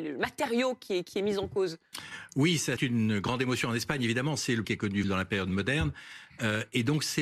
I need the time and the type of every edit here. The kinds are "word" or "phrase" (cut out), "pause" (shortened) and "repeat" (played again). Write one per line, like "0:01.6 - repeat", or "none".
0:02.8 - word
0:04.6 - phrase
0:05.0 - phrase

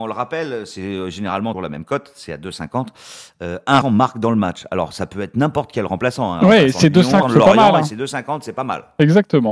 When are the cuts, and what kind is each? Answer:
0:01.5 - word
0:03.8 - word
0:07.2 - word

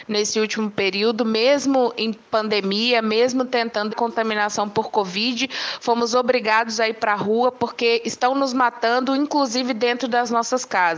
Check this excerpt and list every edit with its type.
0:03.9 - word

